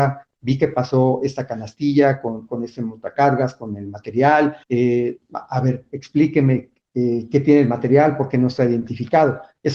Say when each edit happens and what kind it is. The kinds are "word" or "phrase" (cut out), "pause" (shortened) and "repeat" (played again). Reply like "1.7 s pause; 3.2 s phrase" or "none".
4.6 s pause